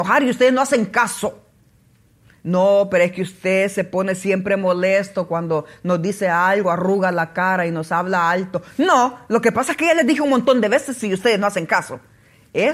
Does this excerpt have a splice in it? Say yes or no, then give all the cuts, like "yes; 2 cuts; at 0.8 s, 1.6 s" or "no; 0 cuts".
no; 0 cuts